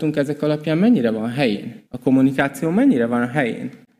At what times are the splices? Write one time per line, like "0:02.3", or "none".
0:01.9